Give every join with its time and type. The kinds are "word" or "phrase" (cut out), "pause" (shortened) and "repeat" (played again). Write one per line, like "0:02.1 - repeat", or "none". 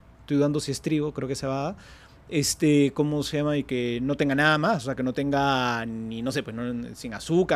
none